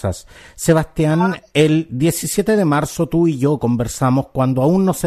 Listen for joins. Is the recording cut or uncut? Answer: uncut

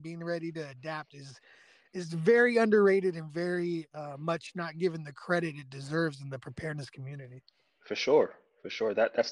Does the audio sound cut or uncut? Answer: uncut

